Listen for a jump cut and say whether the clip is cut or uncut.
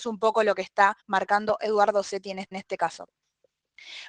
cut